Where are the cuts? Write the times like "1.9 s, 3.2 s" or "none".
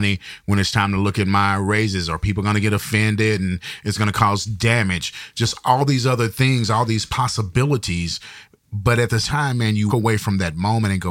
9.2 s, 9.9 s